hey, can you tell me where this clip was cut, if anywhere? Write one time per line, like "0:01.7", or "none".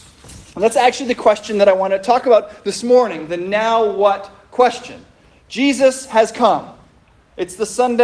none